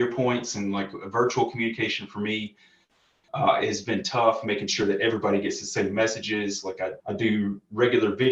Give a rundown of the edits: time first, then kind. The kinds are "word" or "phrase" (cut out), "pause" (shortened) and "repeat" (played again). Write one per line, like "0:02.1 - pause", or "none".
0:07.0 - pause